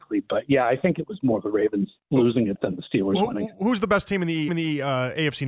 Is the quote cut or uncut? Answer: cut